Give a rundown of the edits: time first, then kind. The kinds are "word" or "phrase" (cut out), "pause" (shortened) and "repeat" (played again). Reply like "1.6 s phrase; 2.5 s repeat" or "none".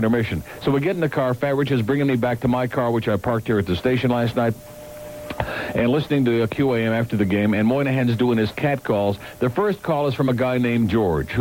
none